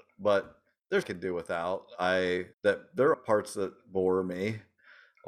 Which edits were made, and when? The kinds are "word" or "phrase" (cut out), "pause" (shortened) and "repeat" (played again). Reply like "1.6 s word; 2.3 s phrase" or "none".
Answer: 1.0 s phrase; 2.5 s pause; 3.1 s word